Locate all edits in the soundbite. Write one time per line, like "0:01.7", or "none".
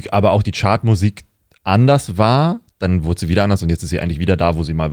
none